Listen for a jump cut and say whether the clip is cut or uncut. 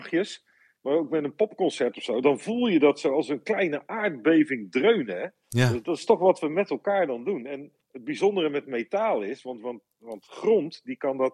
cut